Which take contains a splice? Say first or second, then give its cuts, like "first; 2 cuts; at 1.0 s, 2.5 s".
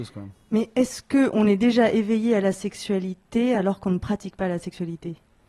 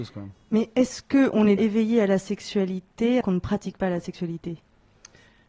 second; 2 cuts; at 1.6 s, 3.2 s